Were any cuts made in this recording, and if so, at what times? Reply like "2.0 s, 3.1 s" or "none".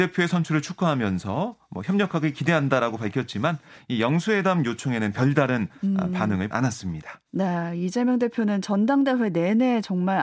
6.5 s